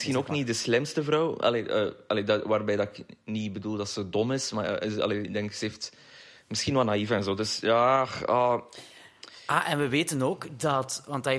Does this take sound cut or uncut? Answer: uncut